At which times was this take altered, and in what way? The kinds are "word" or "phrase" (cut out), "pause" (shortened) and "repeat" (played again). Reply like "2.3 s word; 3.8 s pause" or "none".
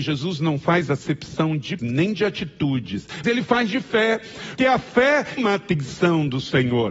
1.8 s word; 3.2 s word; 4.6 s word; 5.4 s word

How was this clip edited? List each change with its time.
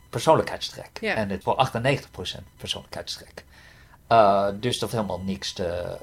1.4 s word; 4.9 s word

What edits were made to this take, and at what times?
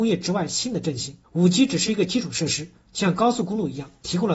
1.2 s pause

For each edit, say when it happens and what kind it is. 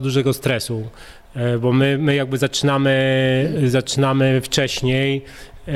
none

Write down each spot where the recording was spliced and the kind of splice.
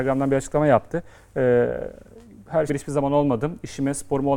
1.2 s pause; 2.7 s phrase

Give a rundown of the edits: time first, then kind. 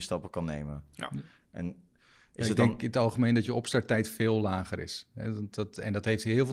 none

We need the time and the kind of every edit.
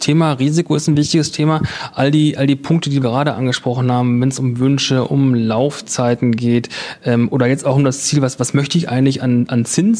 3.0 s word

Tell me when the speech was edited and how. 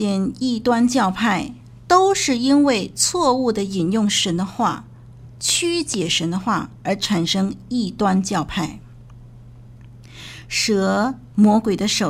none

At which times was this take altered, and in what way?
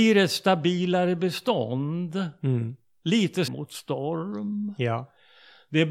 3.5 s word

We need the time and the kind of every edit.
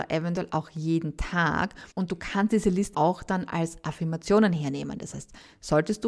1.9 s pause; 2.9 s word

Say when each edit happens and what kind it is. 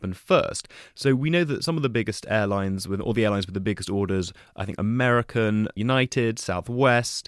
none

